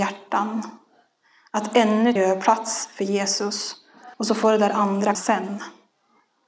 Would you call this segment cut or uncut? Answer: cut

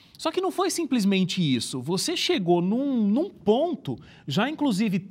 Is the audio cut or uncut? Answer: uncut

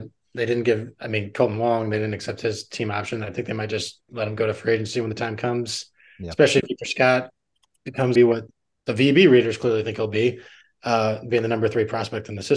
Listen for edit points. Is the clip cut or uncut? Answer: cut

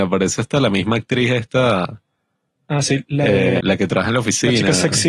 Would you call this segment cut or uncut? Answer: cut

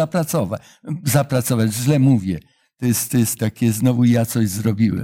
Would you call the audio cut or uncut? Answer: cut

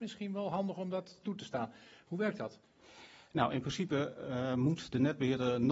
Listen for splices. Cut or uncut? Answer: uncut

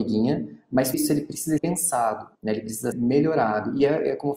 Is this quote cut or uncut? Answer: cut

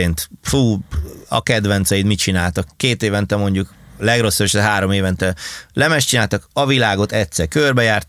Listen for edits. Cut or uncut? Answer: cut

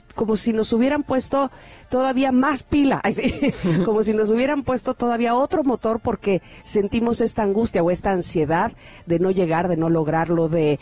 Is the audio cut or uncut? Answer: uncut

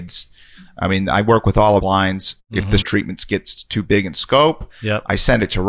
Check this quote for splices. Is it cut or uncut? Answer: cut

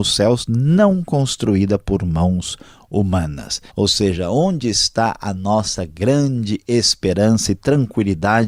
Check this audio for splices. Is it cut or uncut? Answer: cut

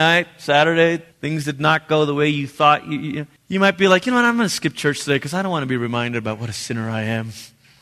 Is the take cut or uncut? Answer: cut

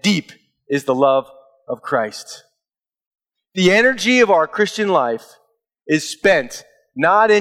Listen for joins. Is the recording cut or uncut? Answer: uncut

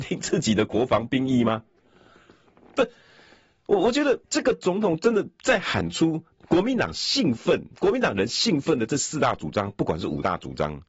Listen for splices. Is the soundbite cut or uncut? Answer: cut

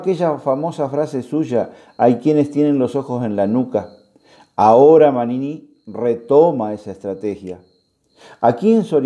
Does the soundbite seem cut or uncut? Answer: uncut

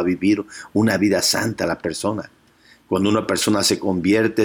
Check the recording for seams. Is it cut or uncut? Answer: uncut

